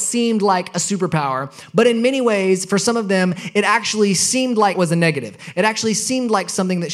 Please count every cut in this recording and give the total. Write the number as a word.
one